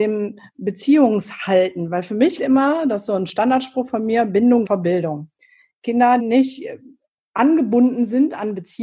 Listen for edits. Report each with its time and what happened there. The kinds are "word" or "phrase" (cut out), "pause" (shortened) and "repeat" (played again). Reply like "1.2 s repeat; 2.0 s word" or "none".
2.4 s word; 4.7 s word; 6.2 s word